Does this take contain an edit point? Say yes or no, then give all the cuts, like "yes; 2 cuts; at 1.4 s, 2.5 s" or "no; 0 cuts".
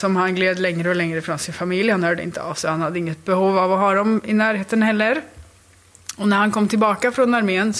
no; 0 cuts